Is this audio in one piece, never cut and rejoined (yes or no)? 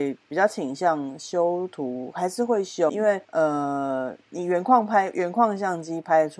no